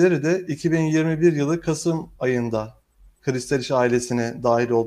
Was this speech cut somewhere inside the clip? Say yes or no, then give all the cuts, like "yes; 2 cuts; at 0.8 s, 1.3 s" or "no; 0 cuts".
no; 0 cuts